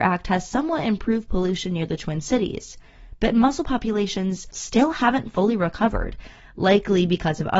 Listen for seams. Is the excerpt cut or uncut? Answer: uncut